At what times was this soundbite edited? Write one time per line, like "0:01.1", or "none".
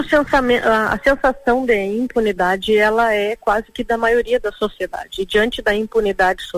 none

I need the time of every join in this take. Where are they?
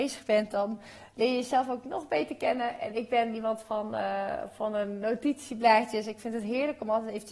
none

